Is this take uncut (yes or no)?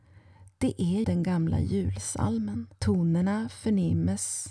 no